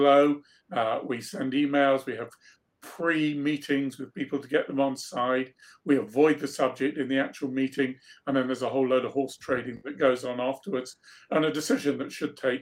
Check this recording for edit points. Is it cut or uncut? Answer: uncut